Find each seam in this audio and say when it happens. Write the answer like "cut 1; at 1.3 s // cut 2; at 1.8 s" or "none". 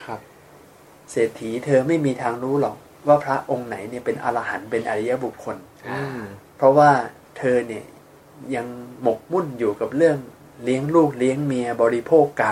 none